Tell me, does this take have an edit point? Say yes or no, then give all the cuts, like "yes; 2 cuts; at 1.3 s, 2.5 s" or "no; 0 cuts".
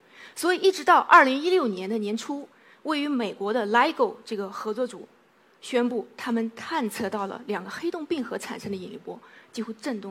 no; 0 cuts